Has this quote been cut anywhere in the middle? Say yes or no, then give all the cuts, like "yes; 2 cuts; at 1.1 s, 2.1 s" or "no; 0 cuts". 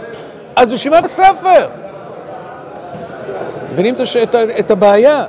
yes; 1 cut; at 1.0 s